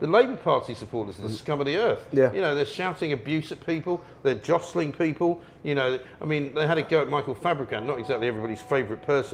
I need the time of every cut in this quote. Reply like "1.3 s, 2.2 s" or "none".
none